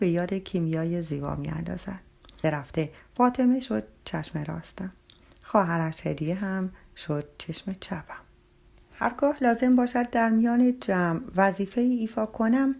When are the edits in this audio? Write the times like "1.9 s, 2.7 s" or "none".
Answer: 2.4 s